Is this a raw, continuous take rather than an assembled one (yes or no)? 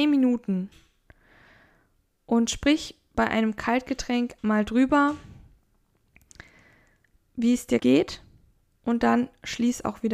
no